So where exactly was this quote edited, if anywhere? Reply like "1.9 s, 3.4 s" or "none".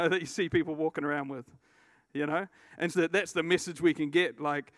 2.9 s